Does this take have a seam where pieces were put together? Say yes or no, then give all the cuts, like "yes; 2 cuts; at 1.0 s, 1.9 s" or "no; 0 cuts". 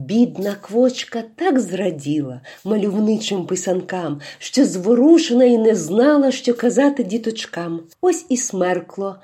no; 0 cuts